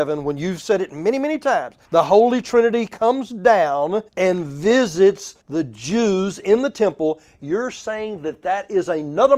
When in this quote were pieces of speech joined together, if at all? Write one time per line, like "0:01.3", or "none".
0:01.8
0:04.1
0:05.4